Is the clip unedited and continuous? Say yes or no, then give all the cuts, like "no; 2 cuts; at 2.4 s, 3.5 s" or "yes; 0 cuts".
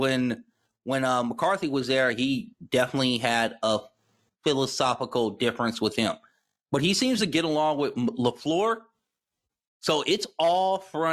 yes; 0 cuts